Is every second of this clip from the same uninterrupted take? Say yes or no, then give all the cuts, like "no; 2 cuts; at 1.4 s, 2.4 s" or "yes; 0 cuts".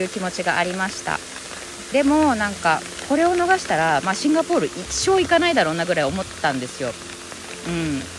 no; 1 cut; at 1.9 s